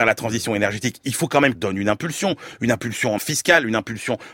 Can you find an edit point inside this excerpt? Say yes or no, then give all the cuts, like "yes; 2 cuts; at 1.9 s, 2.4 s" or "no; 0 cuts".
yes; 2 cuts; at 1.5 s, 3.2 s